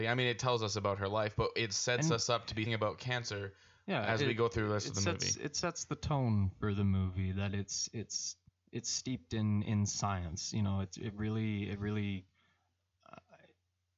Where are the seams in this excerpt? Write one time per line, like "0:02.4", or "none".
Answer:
0:02.7
0:08.5